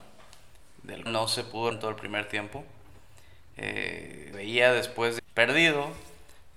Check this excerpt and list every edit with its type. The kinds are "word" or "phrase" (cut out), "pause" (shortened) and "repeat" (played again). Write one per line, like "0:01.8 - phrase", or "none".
0:01.1 - word
0:01.7 - word
0:04.3 - word
0:05.2 - word